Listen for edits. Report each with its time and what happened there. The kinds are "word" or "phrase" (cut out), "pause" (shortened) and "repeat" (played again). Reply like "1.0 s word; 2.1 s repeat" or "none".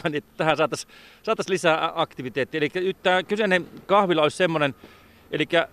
none